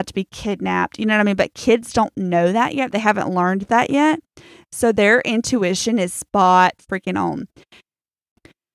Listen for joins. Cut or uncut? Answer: uncut